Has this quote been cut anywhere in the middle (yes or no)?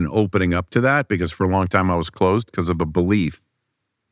no